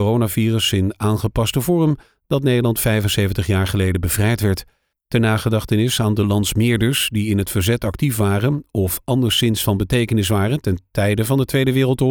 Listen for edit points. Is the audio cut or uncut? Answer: uncut